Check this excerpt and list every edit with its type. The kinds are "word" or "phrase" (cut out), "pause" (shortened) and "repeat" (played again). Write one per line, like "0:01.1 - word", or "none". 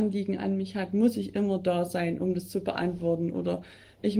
none